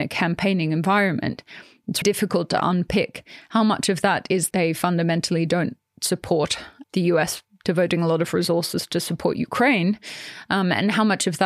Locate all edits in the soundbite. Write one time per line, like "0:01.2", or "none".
0:02.0
0:04.5
0:06.8

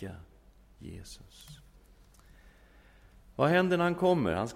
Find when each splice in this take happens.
none

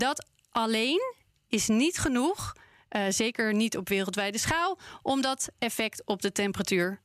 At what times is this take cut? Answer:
none

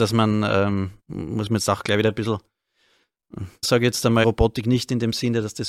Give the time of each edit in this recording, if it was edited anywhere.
0:01.0
0:03.6
0:04.2

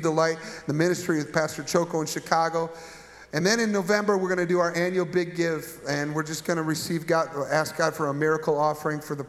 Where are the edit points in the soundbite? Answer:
none

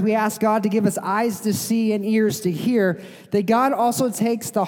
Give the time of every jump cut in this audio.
none

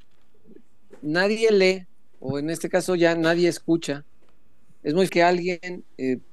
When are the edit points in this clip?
0:05.1

